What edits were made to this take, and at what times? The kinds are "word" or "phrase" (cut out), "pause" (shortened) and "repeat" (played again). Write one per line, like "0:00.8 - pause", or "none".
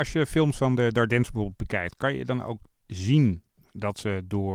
none